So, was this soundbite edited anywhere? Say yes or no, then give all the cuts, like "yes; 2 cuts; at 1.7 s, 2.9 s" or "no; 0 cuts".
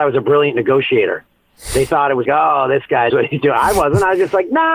yes; 2 cuts; at 2.2 s, 3.1 s